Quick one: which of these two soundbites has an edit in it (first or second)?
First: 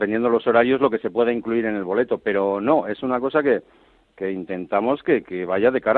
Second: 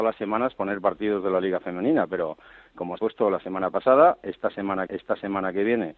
second